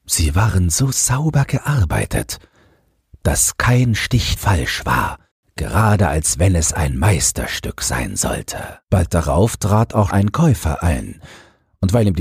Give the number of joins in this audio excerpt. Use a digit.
4